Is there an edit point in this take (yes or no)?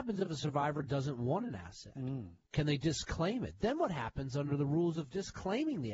no